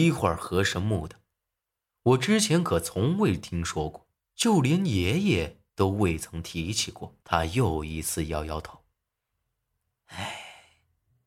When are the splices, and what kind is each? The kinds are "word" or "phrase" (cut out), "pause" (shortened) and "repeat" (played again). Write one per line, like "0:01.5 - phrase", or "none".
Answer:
0:04.2 - pause
0:05.7 - pause
0:07.2 - pause